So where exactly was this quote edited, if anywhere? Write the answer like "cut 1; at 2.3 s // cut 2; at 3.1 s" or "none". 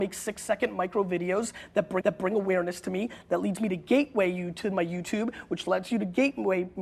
cut 1; at 2.0 s